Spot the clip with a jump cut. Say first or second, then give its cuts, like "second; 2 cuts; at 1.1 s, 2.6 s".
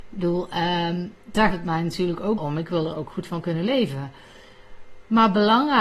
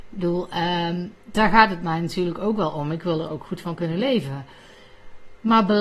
first; 2 cuts; at 1.5 s, 2.4 s